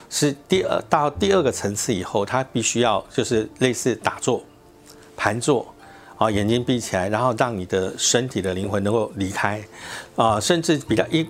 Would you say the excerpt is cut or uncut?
uncut